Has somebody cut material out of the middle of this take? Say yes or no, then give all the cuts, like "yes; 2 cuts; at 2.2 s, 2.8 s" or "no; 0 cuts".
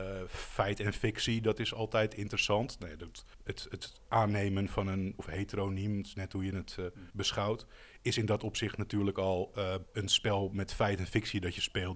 yes; 4 cuts; at 3.3 s, 5.2 s, 7.1 s, 9.9 s